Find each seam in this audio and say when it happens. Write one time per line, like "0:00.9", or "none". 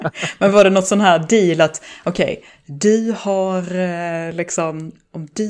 none